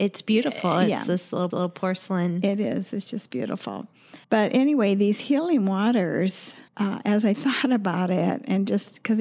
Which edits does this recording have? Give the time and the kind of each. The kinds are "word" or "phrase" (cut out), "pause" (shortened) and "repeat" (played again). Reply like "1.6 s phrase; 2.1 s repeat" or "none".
1.5 s repeat; 4.2 s pause; 6.7 s pause